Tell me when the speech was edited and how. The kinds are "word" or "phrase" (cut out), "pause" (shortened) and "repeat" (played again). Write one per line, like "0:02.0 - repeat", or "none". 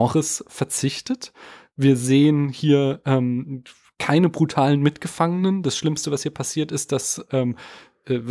none